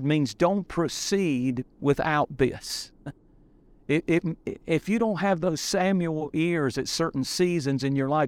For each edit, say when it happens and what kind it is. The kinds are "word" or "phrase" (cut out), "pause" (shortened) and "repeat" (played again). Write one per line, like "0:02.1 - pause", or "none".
0:01.7 - pause